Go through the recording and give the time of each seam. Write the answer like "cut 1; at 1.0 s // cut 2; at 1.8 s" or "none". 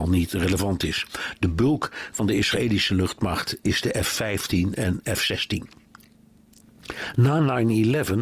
none